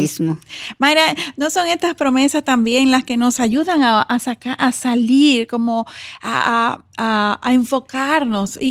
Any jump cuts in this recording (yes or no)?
no